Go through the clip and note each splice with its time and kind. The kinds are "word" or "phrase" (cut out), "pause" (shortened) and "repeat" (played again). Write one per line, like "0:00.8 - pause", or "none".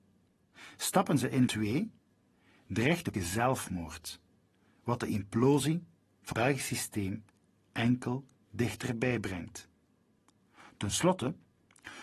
0:01.5 - word
0:03.1 - word
0:06.3 - word